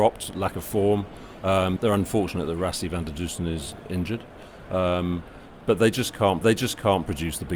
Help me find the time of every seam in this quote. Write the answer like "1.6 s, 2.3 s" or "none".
1.8 s, 6.4 s